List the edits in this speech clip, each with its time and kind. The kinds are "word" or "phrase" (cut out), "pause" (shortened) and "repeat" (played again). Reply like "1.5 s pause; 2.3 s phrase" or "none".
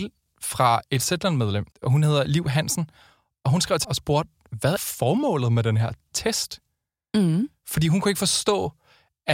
1.7 s pause; 3.8 s word; 4.8 s word